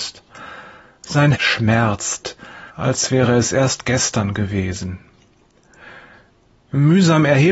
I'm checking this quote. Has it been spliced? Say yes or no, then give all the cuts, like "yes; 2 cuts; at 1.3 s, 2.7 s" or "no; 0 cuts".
yes; 2 cuts; at 1.3 s, 2.7 s